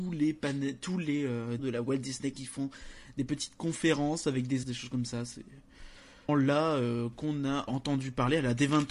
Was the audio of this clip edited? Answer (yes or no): yes